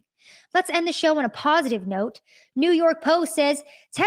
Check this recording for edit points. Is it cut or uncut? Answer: uncut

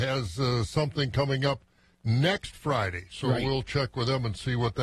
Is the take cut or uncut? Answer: uncut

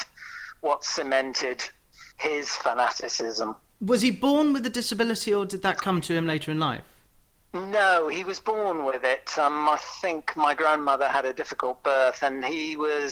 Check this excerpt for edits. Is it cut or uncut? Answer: cut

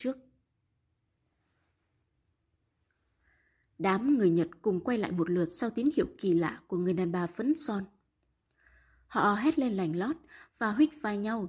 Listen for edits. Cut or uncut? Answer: uncut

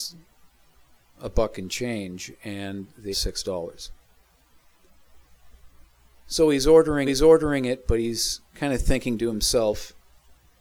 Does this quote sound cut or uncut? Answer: cut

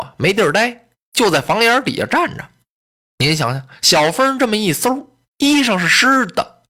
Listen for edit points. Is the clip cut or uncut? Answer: uncut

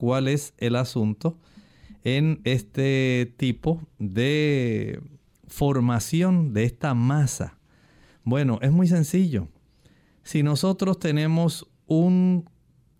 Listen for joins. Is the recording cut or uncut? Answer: uncut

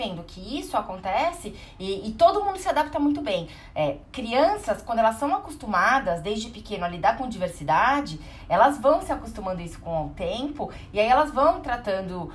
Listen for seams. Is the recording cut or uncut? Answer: uncut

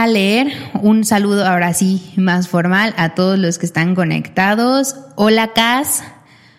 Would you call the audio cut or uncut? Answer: uncut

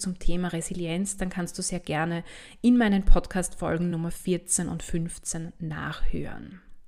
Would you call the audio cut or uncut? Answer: uncut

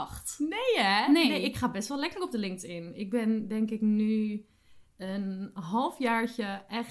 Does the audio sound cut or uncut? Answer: uncut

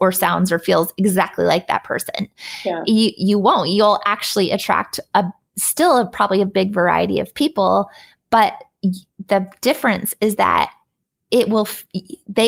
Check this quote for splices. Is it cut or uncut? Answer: uncut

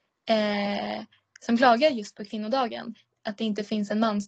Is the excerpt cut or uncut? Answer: uncut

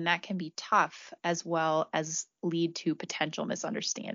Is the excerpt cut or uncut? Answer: uncut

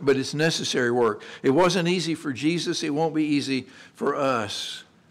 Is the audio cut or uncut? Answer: uncut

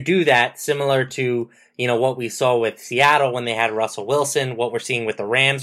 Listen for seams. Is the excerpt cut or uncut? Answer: uncut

